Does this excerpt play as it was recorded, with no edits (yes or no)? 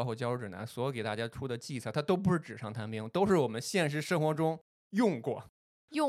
no